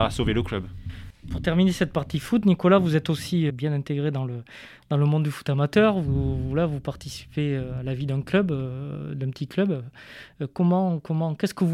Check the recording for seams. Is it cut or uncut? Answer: cut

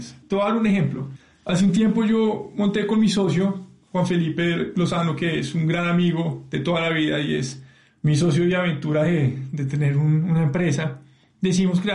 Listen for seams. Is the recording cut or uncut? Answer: uncut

